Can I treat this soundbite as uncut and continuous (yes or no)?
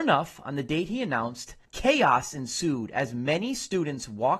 no